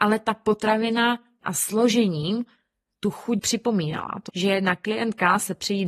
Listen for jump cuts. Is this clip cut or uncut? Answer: cut